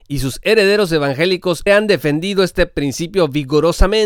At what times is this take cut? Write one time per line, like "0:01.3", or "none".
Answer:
0:01.7